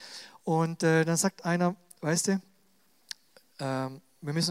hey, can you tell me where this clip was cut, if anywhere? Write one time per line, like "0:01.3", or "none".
none